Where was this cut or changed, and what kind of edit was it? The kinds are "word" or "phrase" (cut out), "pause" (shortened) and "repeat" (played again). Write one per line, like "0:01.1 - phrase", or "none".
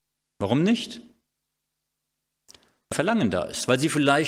0:02.9 - word